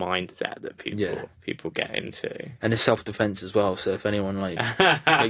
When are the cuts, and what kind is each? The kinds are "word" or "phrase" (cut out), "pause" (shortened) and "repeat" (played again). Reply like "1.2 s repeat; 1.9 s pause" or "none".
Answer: 1.3 s pause